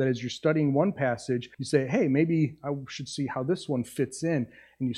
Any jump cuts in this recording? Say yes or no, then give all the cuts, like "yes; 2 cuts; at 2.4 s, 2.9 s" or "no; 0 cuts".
yes; 1 cut; at 1.5 s